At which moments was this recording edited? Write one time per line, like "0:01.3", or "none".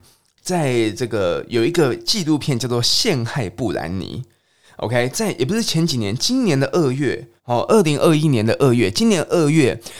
0:07.4

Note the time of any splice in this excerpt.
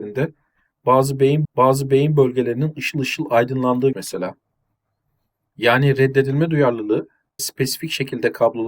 0:01.4
0:03.9
0:07.4

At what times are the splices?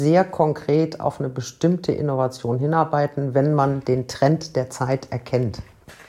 none

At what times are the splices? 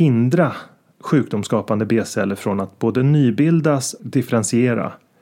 0:04.0

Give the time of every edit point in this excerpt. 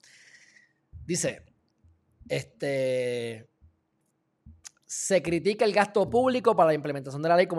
none

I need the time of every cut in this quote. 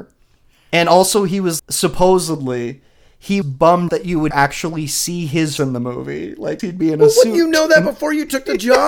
0:01.6
0:03.4
0:03.9
0:04.3
0:05.6
0:06.6

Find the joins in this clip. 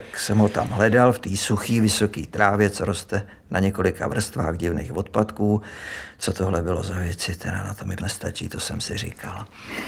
0:08.0

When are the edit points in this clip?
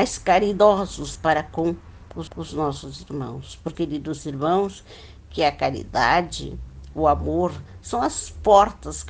0:01.2
0:02.3
0:03.7

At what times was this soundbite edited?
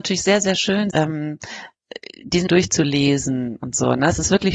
0:00.9
0:02.5

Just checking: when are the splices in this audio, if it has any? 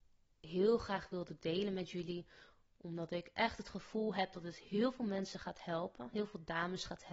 none

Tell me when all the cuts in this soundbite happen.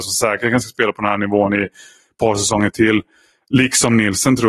none

